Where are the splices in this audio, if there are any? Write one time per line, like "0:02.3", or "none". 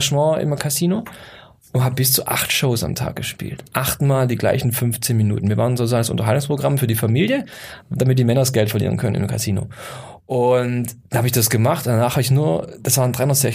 0:11.0